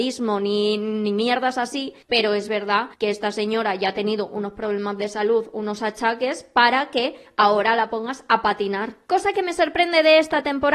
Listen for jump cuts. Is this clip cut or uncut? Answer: cut